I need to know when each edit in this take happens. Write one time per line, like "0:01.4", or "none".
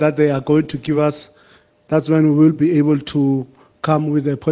none